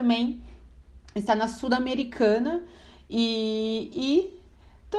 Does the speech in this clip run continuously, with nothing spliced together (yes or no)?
yes